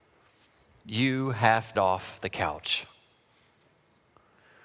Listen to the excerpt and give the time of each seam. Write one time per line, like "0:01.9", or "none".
0:01.7